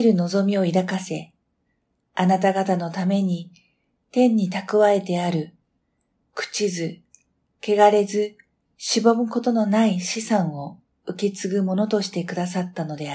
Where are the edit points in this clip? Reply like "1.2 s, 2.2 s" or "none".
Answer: none